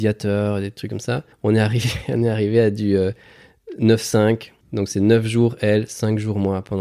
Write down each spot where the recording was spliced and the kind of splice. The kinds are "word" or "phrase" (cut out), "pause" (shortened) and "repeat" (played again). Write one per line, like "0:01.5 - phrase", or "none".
0:01.3 - pause
0:04.6 - pause